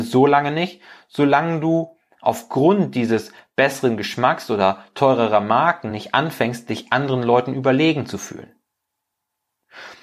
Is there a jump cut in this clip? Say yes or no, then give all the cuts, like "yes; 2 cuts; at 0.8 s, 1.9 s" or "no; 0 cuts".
no; 0 cuts